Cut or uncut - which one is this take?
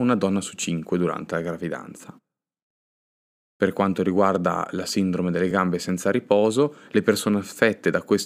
uncut